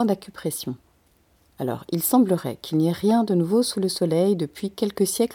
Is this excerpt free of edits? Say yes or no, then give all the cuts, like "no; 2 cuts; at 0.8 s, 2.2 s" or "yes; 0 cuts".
yes; 0 cuts